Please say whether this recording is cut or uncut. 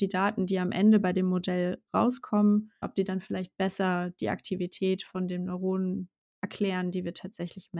cut